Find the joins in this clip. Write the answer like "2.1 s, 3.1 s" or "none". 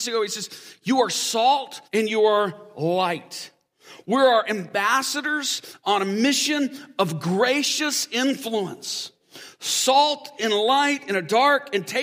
1.8 s